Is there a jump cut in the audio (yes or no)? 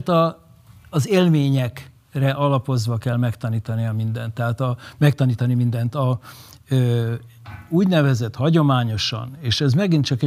no